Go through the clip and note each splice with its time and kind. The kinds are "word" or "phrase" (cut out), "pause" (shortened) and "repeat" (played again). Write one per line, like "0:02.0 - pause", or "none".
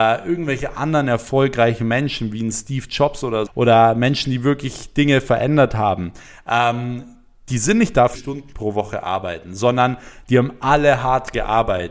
0:03.5 - word
0:08.2 - phrase